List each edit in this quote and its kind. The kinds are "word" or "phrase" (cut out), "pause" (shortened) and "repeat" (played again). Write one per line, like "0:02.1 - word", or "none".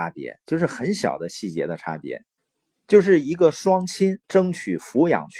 0:02.4 - pause
0:04.2 - pause